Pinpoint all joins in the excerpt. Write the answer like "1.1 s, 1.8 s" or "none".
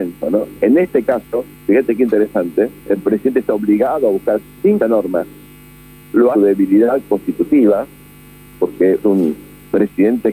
1.5 s, 2.8 s, 4.4 s, 4.8 s, 6.3 s, 9.0 s